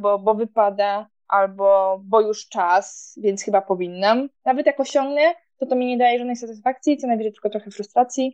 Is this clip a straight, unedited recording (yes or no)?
no